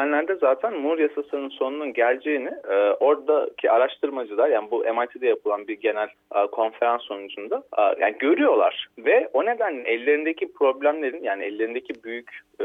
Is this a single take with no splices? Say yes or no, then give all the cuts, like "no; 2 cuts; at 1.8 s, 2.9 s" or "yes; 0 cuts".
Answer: no; 2 cuts; at 6.1 s, 7.7 s